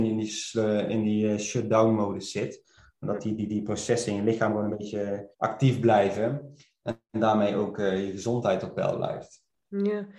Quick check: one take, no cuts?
no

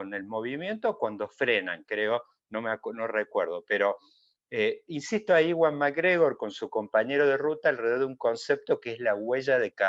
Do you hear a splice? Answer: yes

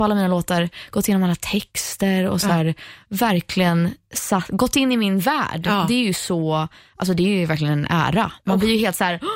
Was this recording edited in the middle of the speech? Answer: no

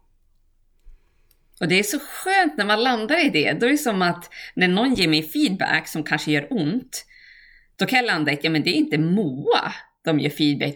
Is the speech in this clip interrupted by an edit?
no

